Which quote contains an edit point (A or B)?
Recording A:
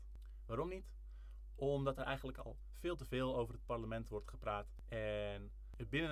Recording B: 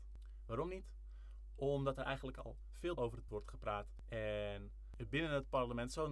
B